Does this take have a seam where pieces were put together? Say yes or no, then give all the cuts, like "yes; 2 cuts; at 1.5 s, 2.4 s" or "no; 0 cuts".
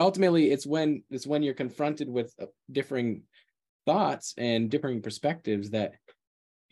no; 0 cuts